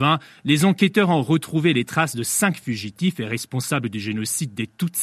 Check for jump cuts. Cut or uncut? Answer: uncut